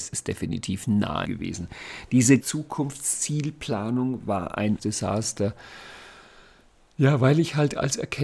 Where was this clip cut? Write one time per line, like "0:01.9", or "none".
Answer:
0:01.3
0:02.4
0:04.8